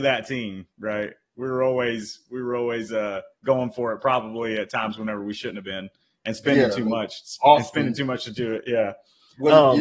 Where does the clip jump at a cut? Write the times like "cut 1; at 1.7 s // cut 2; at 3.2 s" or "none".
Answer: none